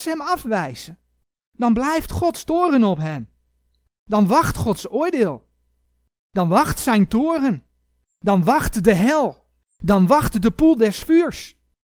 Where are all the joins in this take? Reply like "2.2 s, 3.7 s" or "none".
none